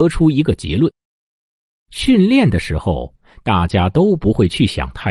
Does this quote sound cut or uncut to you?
uncut